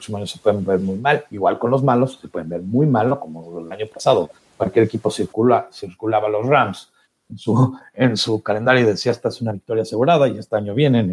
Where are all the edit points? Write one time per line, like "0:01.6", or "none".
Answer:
0:01.3
0:04.4
0:07.0